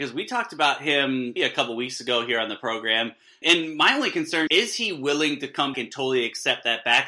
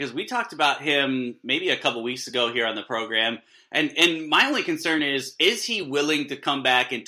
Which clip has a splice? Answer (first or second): first